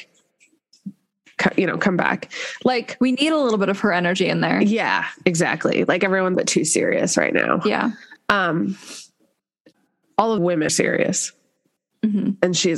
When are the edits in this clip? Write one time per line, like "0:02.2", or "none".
0:06.3
0:10.4
0:10.7